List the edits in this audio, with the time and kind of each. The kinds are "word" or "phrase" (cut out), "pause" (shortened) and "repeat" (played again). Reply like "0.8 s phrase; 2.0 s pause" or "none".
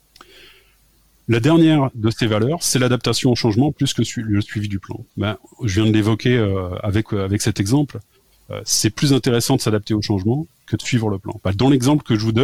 5.1 s pause; 11.4 s pause